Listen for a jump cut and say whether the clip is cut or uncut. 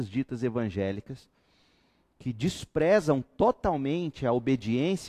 uncut